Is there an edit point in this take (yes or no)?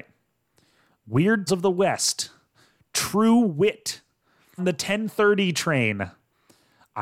yes